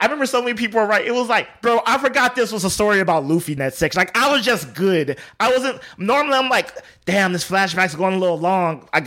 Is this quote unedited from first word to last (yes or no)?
no